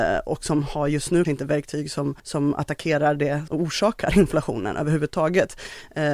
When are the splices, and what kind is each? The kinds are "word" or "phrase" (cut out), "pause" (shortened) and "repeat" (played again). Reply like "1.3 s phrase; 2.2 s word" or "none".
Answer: 1.2 s word; 2.2 s pause; 3.5 s word